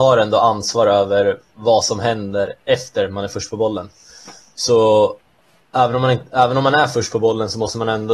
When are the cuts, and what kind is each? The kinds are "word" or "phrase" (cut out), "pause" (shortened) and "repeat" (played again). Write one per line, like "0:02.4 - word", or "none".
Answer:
none